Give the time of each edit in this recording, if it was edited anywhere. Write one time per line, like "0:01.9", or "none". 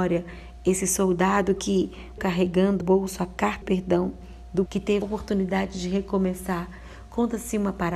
0:02.2
0:02.8
0:03.6
0:04.7
0:05.0